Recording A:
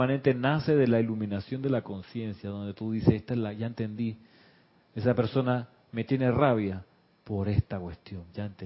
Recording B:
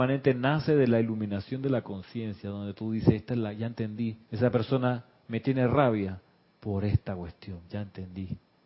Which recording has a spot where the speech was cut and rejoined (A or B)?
B